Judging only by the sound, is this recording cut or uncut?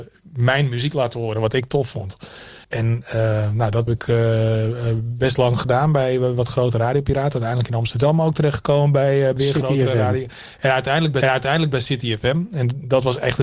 cut